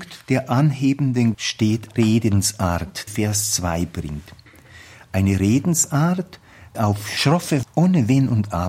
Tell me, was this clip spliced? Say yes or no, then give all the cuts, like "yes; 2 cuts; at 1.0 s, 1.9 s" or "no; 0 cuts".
yes; 5 cuts; at 1.3 s, 2.0 s, 3.1 s, 6.7 s, 7.6 s